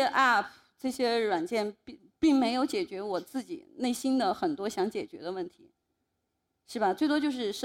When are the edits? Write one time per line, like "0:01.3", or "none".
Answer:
none